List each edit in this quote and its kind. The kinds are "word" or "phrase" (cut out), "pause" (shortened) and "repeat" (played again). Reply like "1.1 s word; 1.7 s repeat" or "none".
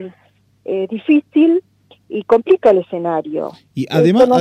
none